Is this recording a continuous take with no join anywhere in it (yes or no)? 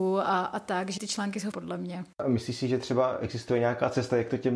no